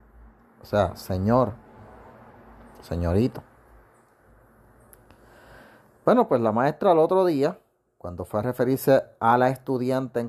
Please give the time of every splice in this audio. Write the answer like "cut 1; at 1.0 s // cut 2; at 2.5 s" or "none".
none